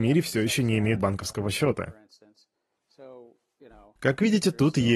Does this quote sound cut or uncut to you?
cut